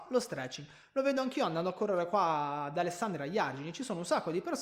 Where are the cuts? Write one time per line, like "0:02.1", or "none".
none